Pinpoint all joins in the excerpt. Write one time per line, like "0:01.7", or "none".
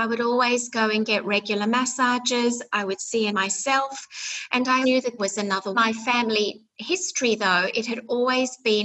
0:03.3
0:04.8
0:05.2
0:05.7